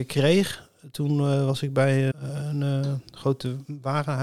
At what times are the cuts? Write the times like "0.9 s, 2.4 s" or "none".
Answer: 2.1 s